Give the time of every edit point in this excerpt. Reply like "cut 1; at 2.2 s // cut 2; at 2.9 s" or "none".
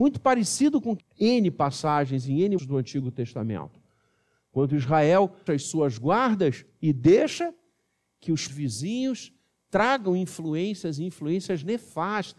cut 1; at 1.0 s // cut 2; at 2.6 s // cut 3; at 5.5 s // cut 4; at 8.5 s